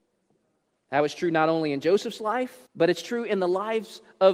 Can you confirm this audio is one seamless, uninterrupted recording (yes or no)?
no